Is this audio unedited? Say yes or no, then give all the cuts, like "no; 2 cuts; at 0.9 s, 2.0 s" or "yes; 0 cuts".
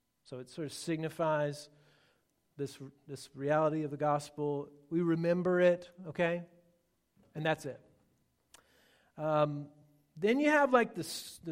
yes; 0 cuts